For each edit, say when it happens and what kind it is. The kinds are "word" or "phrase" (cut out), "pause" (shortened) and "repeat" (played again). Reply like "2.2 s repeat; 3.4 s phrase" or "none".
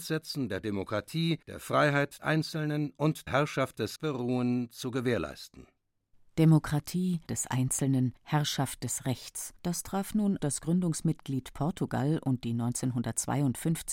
1.4 s pause; 2.2 s word; 3.3 s word; 4.0 s word; 7.3 s word; 8.2 s pause; 9.6 s pause; 10.4 s word